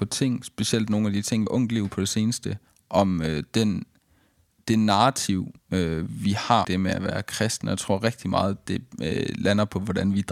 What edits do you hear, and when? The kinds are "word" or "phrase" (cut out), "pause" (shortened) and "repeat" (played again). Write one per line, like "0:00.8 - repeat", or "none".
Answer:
0:01.5 - phrase
0:02.7 - pause
0:05.6 - pause
0:06.6 - word